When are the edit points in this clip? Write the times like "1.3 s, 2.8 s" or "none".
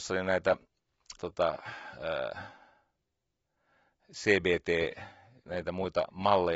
1.2 s, 5.4 s